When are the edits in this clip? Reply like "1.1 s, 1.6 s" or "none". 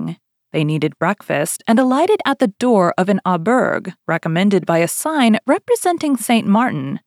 4.0 s